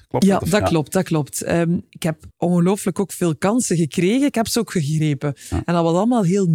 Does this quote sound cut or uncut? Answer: cut